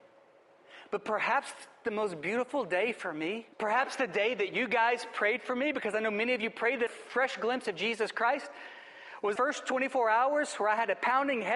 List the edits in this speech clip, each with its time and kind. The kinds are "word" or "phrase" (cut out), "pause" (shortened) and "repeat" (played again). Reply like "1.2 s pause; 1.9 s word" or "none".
3.5 s pause; 6.9 s phrase; 9.4 s word